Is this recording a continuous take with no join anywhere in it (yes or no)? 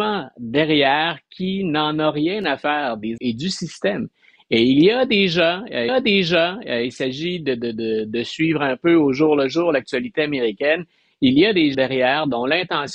no